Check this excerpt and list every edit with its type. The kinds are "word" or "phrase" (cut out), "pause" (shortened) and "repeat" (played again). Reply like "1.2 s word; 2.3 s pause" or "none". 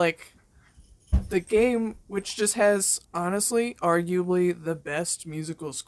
3.0 s pause